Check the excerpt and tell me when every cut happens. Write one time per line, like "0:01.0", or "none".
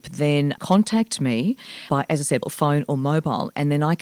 0:02.4